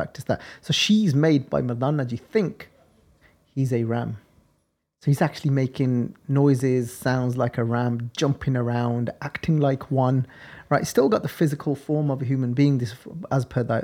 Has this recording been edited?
no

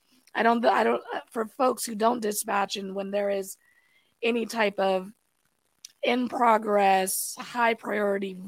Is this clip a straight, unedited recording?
yes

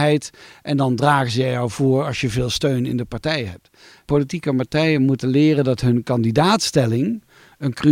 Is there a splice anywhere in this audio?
no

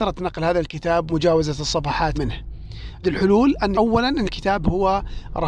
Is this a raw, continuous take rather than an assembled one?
no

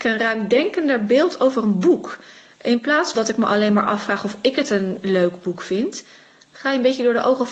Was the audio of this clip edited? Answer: yes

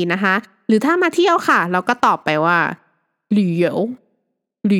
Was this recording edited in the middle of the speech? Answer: no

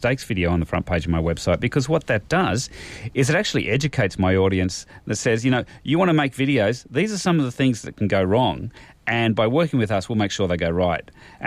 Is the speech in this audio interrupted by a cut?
no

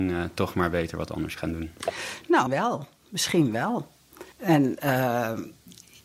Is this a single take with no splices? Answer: no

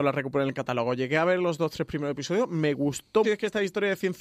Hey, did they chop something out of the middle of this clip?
yes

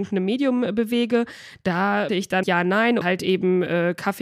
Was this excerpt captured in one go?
no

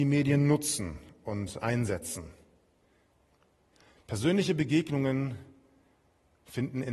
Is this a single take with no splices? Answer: yes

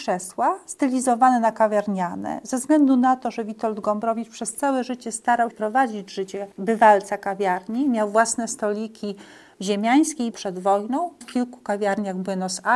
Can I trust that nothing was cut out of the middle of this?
no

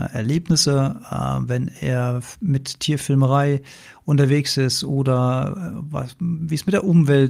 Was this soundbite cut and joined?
no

